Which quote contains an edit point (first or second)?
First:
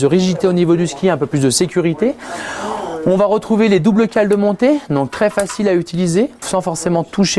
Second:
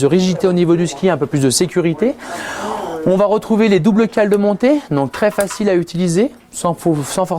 first